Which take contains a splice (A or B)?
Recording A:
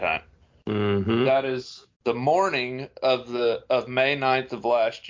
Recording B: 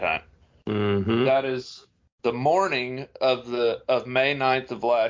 A